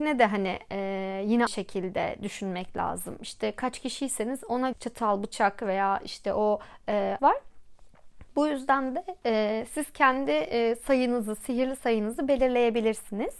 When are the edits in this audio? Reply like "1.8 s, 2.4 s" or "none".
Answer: 1.5 s, 4.7 s, 7.2 s